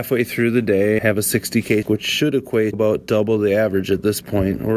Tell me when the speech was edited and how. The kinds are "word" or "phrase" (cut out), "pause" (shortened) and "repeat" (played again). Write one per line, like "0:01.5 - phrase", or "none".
0:01.0 - word
0:01.8 - word
0:02.7 - word